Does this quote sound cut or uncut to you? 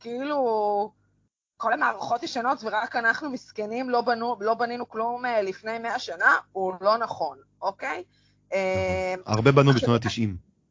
uncut